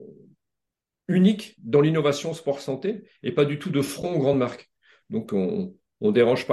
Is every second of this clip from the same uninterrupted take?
yes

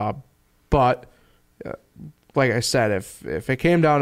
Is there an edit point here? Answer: no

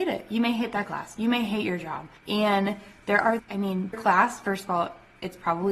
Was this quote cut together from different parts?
yes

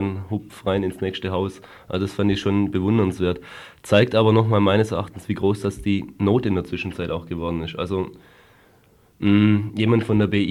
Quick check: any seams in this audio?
no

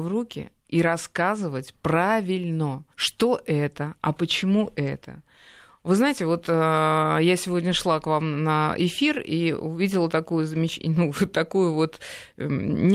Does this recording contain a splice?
yes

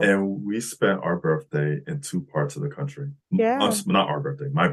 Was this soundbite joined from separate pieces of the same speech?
no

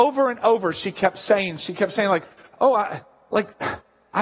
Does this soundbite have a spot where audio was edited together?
no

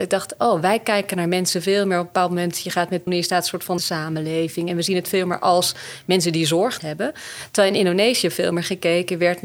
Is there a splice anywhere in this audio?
yes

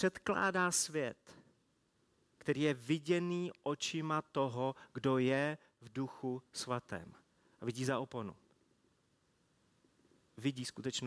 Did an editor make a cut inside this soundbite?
no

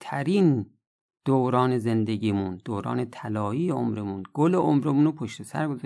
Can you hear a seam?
no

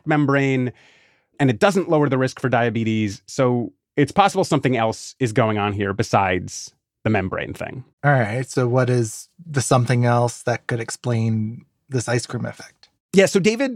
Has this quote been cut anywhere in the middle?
yes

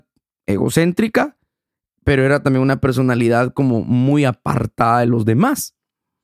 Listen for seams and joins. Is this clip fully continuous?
yes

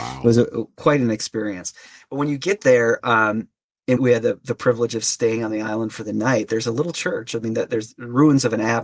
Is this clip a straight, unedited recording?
no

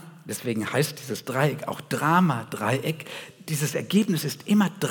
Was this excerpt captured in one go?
yes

